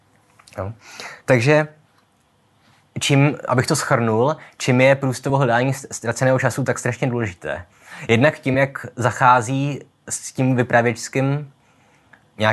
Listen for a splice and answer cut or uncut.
uncut